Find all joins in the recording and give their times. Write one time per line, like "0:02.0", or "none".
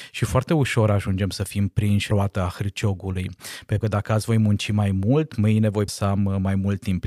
0:02.1
0:03.8
0:05.9